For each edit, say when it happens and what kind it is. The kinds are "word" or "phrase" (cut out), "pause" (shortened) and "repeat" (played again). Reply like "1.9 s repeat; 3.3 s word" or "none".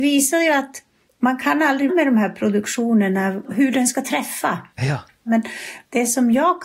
1.1 s pause; 1.9 s word; 4.7 s pause